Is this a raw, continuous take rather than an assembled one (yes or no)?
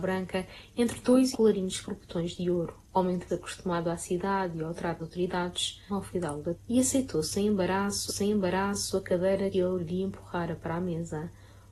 no